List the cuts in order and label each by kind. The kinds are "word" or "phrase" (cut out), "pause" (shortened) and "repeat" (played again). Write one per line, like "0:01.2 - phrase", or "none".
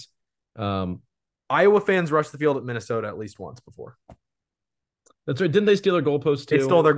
none